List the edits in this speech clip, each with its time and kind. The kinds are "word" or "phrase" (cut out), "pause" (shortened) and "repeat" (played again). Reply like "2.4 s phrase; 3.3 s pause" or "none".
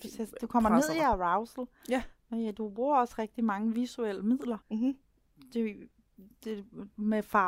4.6 s pause

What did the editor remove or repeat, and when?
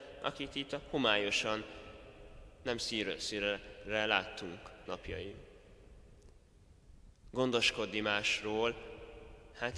4.9 s phrase

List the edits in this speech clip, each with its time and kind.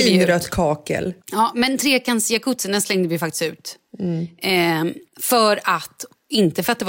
1.2 s pause; 5.1 s pause

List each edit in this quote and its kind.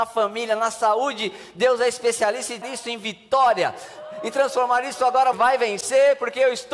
2.6 s word; 5.3 s word

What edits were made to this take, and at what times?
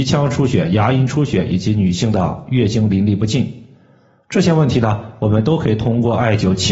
none

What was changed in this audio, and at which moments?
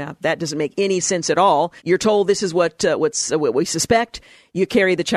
1.8 s pause

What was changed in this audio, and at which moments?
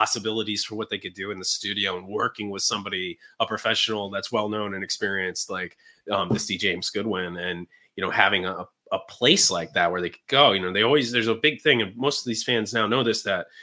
none

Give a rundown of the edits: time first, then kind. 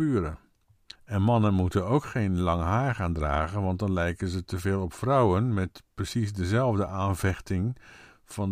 1.0 s pause

